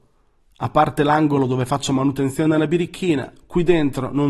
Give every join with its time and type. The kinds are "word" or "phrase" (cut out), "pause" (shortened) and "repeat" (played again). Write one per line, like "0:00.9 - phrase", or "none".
none